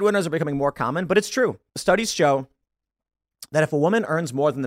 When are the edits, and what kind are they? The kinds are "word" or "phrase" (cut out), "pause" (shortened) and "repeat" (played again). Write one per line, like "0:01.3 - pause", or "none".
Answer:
0:01.7 - pause